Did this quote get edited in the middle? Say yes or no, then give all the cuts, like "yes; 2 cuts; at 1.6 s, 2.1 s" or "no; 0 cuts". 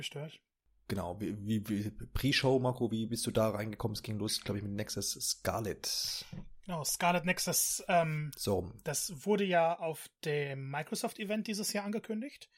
no; 0 cuts